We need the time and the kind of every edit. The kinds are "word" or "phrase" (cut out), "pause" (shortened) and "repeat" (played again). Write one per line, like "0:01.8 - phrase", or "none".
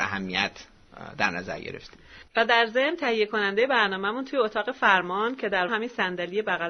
0:02.3 - pause
0:05.7 - word